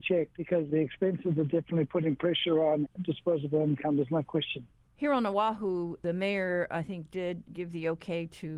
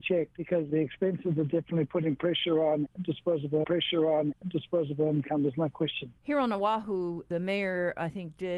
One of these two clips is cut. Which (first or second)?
second